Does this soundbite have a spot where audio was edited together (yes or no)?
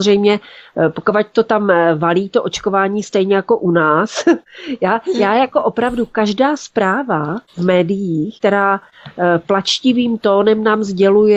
no